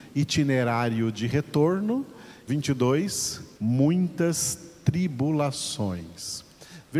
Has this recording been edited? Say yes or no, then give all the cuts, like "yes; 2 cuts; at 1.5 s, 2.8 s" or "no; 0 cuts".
yes; 2 cuts; at 2.5 s, 3.5 s